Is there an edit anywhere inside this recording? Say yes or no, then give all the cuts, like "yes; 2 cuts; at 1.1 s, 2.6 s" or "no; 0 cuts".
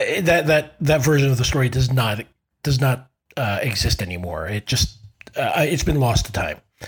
no; 0 cuts